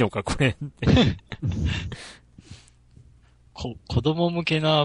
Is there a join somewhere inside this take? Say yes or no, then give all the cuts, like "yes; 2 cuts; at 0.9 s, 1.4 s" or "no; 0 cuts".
no; 0 cuts